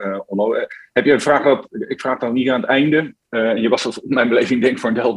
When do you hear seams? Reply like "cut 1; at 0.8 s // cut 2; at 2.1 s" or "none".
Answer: none